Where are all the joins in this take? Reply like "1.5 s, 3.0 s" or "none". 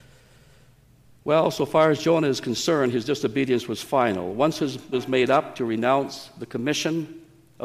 4.9 s